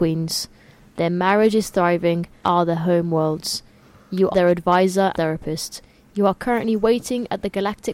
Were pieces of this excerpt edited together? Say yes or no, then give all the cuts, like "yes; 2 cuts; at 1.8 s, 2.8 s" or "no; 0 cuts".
yes; 3 cuts; at 2.4 s, 4.3 s, 5.1 s